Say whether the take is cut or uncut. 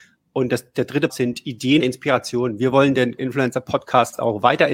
cut